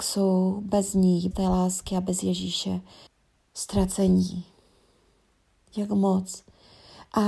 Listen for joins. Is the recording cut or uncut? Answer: cut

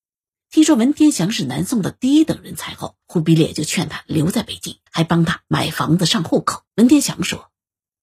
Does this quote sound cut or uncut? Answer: cut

